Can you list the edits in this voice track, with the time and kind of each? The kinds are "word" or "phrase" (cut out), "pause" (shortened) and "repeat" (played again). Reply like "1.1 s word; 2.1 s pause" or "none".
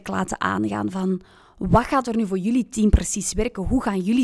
none